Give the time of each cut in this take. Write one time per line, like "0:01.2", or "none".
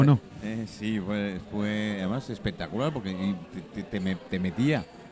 none